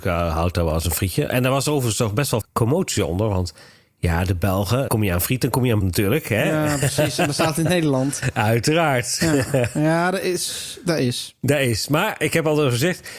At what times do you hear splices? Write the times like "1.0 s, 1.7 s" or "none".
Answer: 2.4 s, 4.9 s, 5.8 s

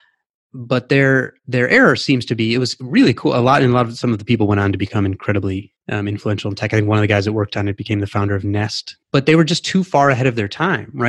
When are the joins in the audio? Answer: 1.4 s, 5.8 s, 9.0 s

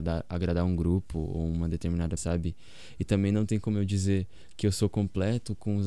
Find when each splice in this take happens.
2.2 s

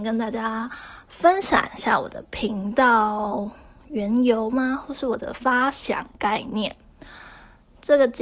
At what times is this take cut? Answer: none

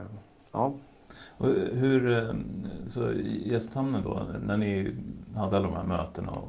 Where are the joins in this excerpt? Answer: none

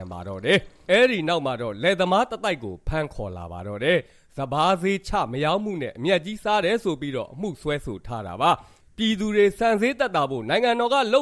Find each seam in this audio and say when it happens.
none

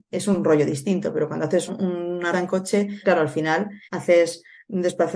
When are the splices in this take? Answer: 1.7 s, 2.3 s, 3.0 s, 3.8 s

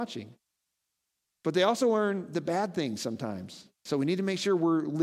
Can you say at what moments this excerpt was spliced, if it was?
3.8 s

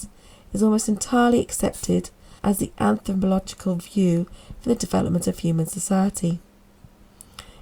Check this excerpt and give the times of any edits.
2.4 s

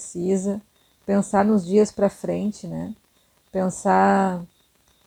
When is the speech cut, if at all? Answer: none

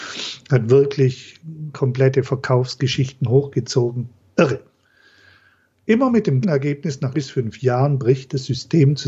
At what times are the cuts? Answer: 1.7 s, 6.4 s, 7.1 s

